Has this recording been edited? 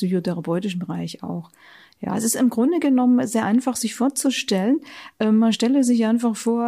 no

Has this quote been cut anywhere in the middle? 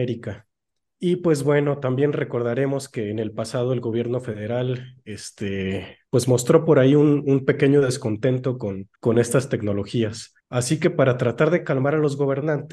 yes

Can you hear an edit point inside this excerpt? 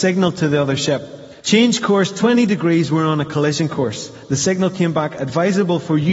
yes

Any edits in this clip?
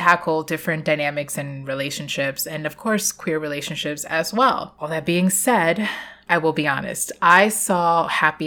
no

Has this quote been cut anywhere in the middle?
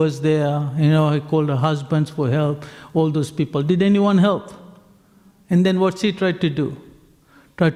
no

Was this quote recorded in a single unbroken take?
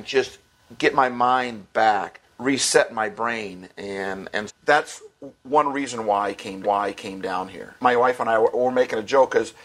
no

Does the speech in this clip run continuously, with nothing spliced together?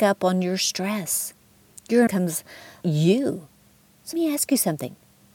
no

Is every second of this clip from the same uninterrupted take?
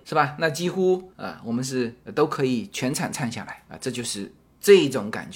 yes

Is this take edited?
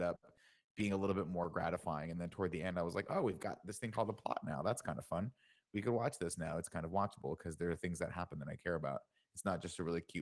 no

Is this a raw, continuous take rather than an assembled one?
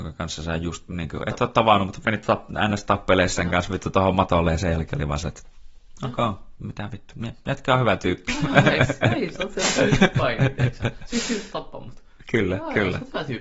yes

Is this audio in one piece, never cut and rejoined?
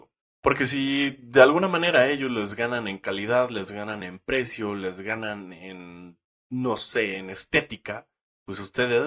yes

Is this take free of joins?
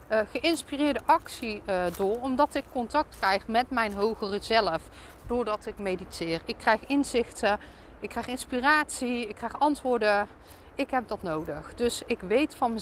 yes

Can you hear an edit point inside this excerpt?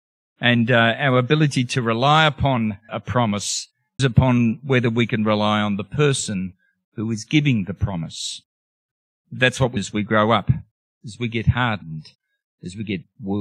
yes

